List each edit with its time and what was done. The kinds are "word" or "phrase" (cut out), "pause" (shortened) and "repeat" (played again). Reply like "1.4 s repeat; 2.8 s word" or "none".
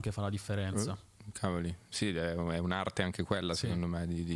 2.0 s word